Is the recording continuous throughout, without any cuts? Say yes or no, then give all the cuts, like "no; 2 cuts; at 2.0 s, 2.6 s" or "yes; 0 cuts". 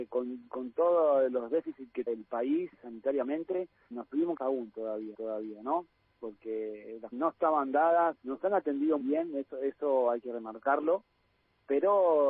no; 8 cuts; at 2.1 s, 2.7 s, 3.9 s, 4.4 s, 5.1 s, 7.1 s, 8.2 s, 9.0 s